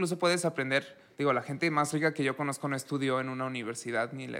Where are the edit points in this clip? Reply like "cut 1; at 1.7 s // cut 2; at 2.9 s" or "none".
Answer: cut 1; at 1.1 s